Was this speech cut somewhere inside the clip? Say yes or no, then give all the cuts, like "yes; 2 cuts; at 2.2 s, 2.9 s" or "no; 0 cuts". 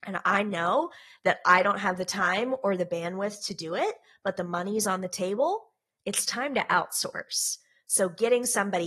no; 0 cuts